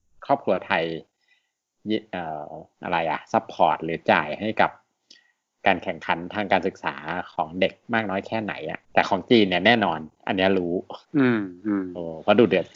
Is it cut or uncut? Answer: cut